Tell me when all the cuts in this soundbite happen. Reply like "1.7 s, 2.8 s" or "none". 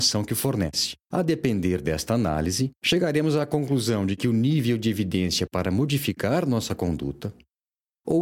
1.0 s, 2.8 s, 5.5 s